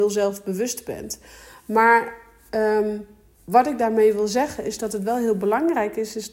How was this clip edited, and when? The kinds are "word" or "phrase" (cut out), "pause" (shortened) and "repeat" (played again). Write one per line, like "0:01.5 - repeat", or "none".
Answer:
none

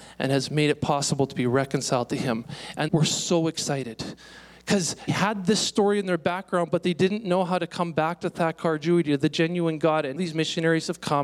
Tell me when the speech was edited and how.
0:02.9 - phrase
0:05.1 - word
0:10.2 - word

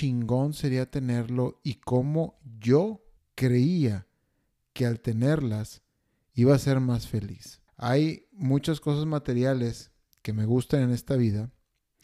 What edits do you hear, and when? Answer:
0:03.2 - pause
0:07.7 - pause

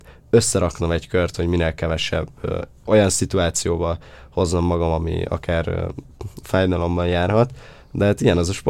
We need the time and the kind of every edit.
none

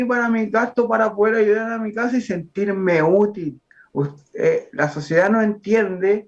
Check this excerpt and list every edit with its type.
none

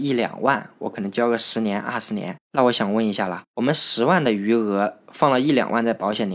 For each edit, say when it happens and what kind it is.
0:02.4 - pause

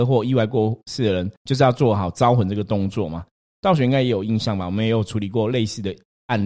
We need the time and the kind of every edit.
0:01.4 - pause

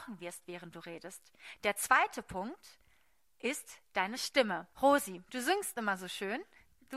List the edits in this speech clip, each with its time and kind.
0:04.7 - pause

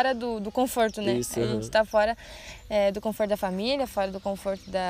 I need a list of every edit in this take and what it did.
none

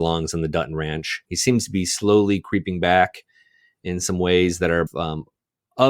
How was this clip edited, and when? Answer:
0:04.9 - word

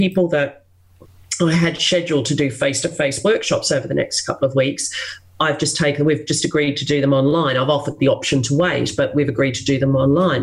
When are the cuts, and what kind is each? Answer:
none

